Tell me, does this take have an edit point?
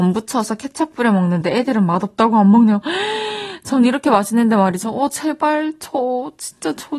no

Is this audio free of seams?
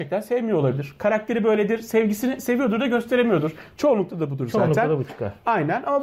yes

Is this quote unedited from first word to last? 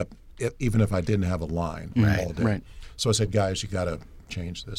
yes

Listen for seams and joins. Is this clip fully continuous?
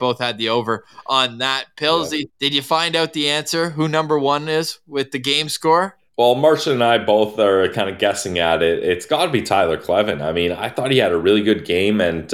no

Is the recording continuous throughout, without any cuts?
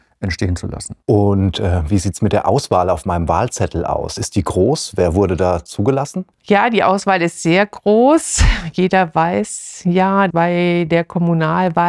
no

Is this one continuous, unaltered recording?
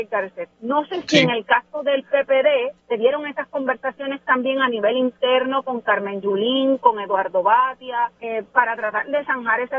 no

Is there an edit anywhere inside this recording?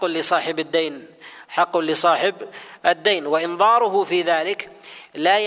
no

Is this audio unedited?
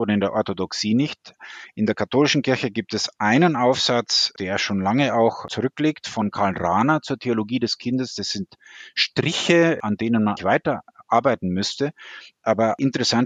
no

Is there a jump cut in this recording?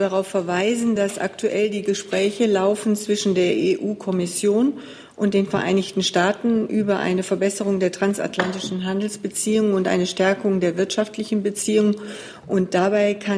no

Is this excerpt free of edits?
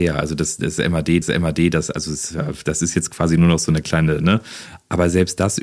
no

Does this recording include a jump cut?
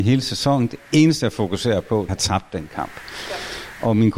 yes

